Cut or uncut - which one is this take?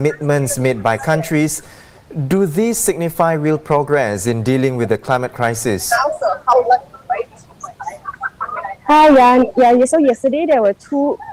uncut